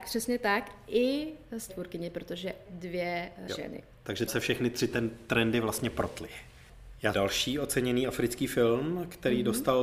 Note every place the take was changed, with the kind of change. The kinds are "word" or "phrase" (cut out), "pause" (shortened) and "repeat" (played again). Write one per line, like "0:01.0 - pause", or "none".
0:01.7 - phrase
0:02.7 - word
0:03.5 - phrase
0:04.3 - word
0:07.1 - phrase